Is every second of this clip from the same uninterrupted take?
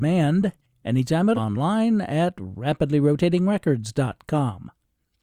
no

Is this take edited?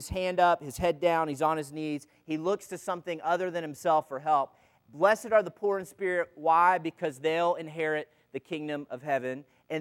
no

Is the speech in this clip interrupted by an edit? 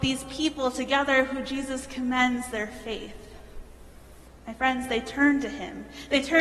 no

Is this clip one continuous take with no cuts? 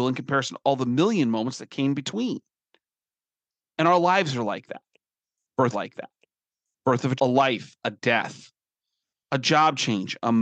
no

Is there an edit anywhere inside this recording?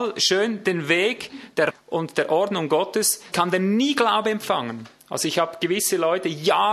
yes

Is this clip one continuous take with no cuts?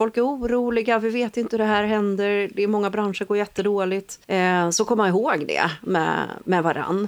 no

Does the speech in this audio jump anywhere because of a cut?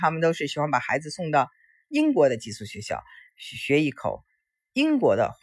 no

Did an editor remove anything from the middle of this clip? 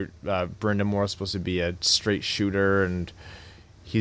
no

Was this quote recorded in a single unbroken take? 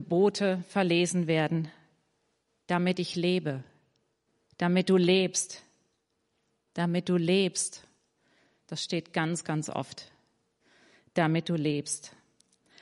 yes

